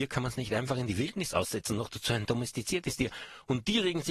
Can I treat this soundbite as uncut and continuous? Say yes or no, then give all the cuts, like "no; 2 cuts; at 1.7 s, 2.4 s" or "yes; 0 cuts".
yes; 0 cuts